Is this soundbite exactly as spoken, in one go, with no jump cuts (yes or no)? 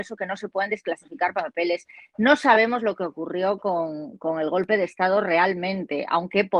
yes